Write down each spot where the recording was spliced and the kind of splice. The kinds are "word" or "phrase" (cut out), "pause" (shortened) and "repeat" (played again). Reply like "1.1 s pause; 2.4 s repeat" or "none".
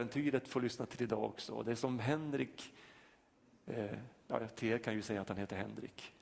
none